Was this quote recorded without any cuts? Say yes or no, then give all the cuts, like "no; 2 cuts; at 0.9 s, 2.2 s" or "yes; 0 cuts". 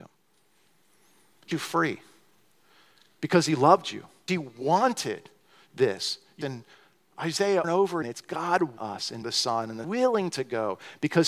no; 8 cuts; at 1.5 s, 4.3 s, 6.4 s, 7.6 s, 8.0 s, 8.8 s, 9.2 s, 9.8 s